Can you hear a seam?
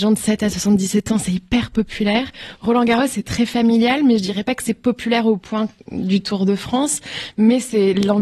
no; 0 cuts

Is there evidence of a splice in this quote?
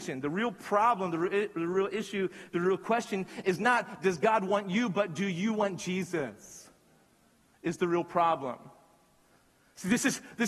no; 0 cuts

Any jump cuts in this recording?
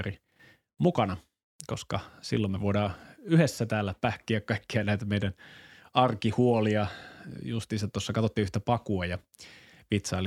no; 0 cuts

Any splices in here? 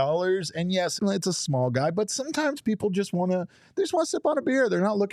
yes; 1 cut; at 1.0 s

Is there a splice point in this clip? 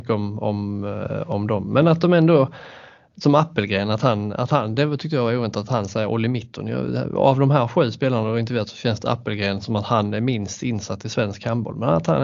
no; 0 cuts

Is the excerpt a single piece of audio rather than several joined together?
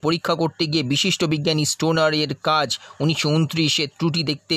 yes; 0 cuts

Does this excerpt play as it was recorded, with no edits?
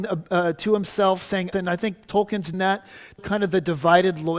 no; 3 cuts; at 1.5 s, 2.5 s, 3.2 s

